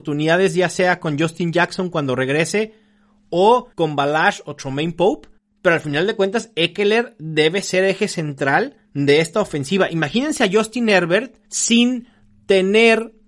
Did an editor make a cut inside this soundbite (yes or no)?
yes